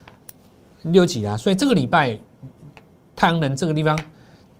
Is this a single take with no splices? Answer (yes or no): yes